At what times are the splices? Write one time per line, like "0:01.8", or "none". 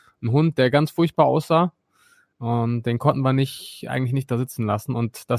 none